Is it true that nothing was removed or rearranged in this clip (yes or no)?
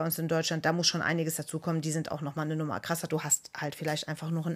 yes